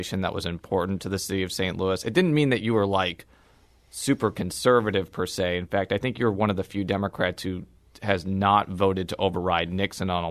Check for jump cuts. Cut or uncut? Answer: uncut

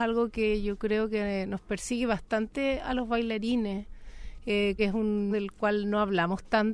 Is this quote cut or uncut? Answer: cut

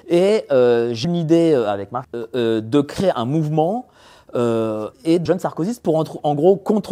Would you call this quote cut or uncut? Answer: cut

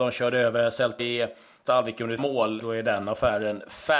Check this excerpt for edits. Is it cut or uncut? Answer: cut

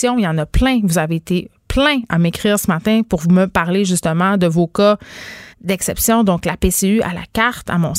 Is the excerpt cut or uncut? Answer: cut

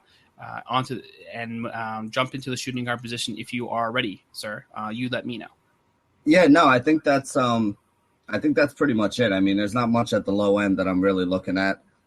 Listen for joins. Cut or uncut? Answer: uncut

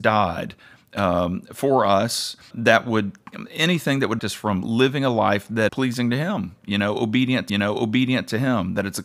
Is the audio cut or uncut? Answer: cut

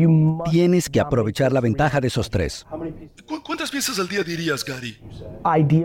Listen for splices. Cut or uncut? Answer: uncut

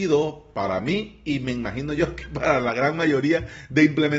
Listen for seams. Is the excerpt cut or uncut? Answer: uncut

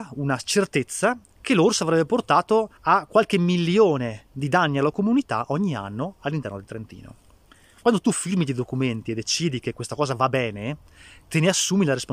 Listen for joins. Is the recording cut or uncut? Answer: cut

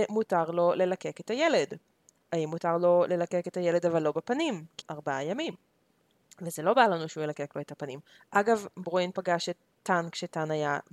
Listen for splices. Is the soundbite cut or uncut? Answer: cut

